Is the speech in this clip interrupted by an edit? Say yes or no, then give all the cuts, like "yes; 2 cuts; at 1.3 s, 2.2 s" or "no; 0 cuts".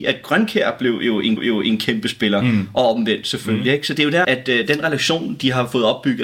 yes; 2 cuts; at 1.4 s, 4.2 s